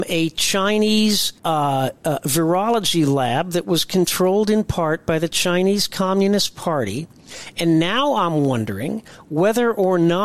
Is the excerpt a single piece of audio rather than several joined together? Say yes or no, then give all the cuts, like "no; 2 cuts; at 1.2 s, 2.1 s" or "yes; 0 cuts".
no; 1 cut; at 1.4 s